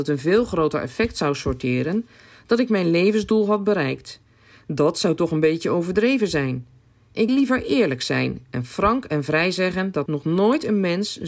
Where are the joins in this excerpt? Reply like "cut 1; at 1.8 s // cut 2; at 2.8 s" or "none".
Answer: cut 1; at 7.3 s // cut 2; at 10.1 s